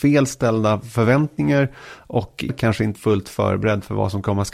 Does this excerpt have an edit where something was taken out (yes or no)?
yes